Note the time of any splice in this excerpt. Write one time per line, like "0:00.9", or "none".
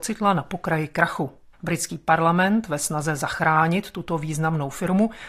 0:01.5